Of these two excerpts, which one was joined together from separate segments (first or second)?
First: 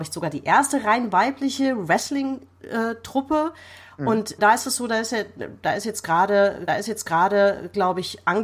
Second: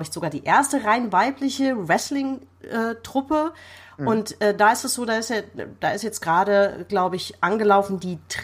first